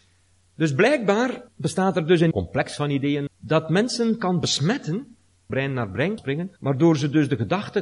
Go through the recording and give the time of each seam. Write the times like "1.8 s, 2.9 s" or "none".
1.5 s, 2.3 s, 3.3 s, 5.5 s, 6.2 s, 6.6 s